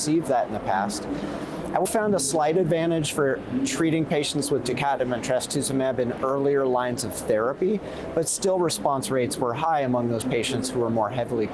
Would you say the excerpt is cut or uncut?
cut